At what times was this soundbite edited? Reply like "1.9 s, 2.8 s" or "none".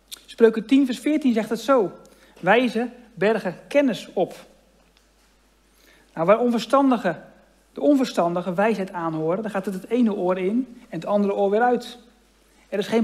none